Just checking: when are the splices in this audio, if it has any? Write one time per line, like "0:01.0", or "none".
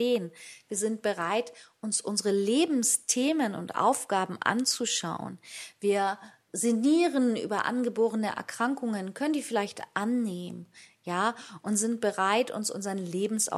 0:06.5

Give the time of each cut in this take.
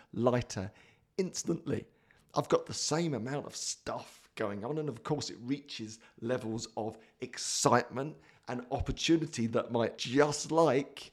0:10.0

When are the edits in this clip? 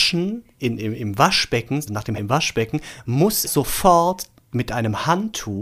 0:01.9
0:02.2
0:03.5

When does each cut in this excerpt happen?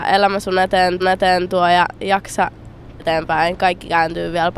0:01.0
0:03.0

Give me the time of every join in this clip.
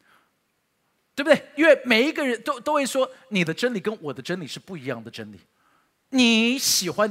0:05.9

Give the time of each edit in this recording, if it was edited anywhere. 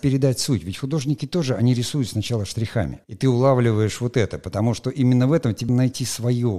0:03.0
0:05.7

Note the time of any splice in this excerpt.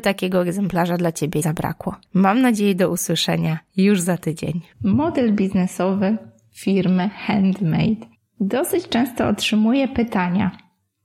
0:01.4
0:02.0
0:04.7
0:08.1

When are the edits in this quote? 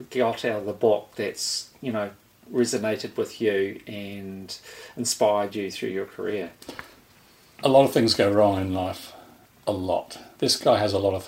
none

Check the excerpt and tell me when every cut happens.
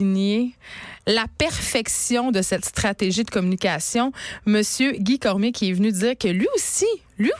none

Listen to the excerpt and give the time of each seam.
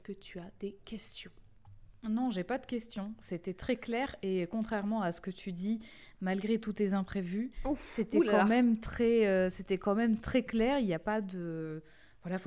0:02.0

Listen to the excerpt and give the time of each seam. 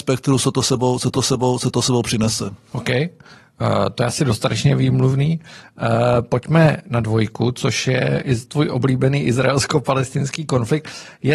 0:01.1

